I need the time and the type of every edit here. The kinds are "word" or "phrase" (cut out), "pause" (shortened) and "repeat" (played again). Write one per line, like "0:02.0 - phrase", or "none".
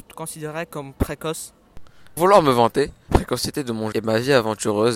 0:02.2 - word
0:03.1 - word
0:03.9 - word